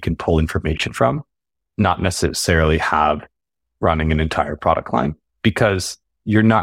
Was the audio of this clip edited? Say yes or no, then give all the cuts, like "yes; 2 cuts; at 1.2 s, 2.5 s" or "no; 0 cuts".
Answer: no; 0 cuts